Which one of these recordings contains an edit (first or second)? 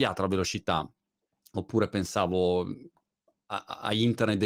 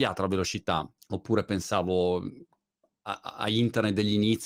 second